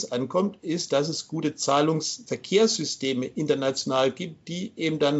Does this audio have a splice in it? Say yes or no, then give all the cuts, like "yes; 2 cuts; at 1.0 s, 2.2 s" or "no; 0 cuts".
no; 0 cuts